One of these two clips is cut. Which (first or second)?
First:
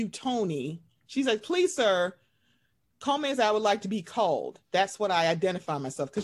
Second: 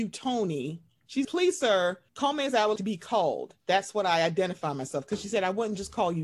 second